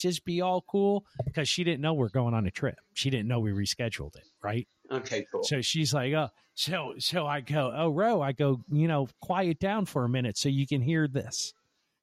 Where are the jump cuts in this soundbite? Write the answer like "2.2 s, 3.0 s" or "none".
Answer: none